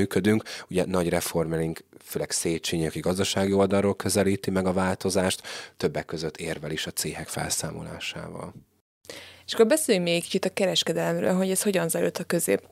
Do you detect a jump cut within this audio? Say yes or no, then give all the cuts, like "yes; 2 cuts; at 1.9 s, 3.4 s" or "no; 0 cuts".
yes; 1 cut; at 5.7 s